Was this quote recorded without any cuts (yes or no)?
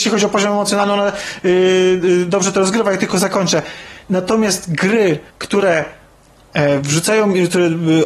no